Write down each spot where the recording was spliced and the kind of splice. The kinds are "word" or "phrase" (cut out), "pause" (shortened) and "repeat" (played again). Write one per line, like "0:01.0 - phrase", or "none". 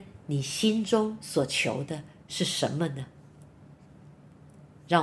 none

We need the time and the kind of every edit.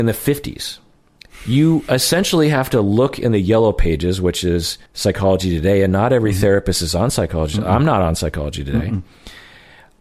0:04.9 - pause

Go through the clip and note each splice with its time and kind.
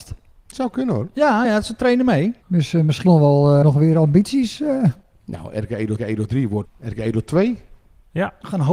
0:01.4 - word
0:02.4 - pause
0:03.1 - phrase
0:03.6 - word
0:06.0 - repeat
0:06.7 - phrase

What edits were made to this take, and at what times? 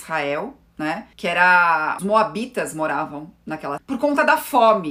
0:01.1 - pause
0:02.0 - phrase
0:03.8 - word

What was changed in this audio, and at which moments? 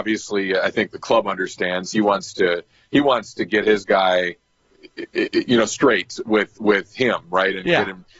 none

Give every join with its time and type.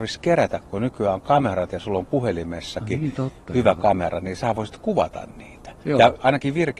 none

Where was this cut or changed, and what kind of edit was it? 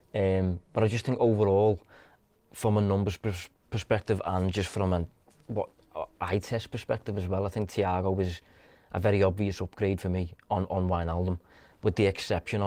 none

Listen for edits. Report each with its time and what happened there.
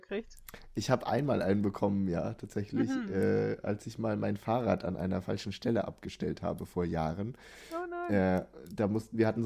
none

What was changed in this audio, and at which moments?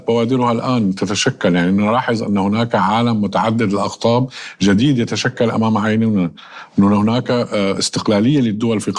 none

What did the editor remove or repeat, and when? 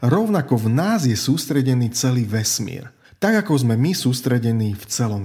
0:03.0 - pause

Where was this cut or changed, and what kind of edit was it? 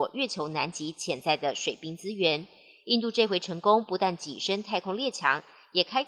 none

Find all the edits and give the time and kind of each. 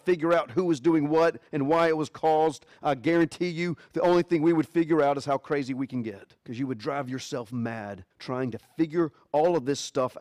0:06.4 - pause
0:08.1 - pause

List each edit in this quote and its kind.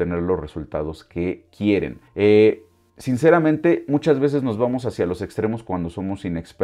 0:02.1 - pause

